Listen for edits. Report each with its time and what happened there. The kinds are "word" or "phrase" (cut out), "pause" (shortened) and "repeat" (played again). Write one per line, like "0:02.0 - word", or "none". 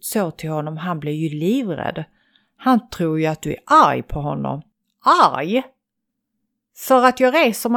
0:04.7 - pause